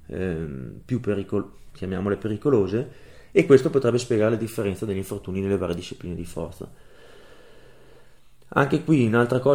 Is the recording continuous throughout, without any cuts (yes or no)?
yes